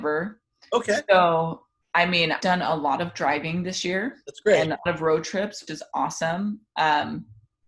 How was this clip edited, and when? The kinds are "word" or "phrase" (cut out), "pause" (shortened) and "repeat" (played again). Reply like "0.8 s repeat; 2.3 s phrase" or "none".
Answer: 2.4 s word; 4.9 s word; 5.7 s word